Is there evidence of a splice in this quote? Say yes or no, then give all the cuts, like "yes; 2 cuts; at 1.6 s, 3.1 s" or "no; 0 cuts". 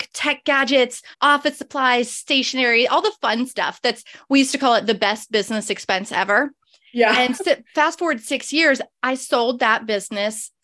yes; 2 cuts; at 1.1 s, 7.4 s